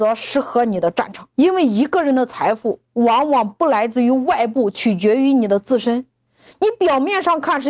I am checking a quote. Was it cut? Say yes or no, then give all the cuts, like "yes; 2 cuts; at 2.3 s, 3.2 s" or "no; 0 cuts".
yes; 1 cut; at 1.3 s